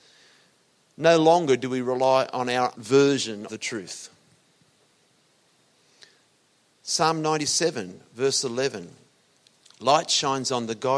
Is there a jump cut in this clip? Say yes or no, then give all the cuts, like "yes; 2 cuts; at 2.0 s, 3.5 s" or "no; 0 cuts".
yes; 2 cuts; at 2.7 s, 3.5 s